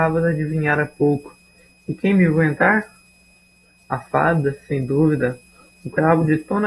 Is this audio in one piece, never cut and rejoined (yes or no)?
yes